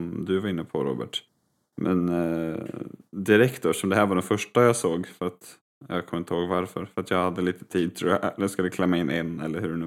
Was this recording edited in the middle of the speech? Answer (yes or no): no